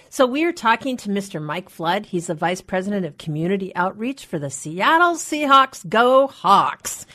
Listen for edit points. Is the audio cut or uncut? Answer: uncut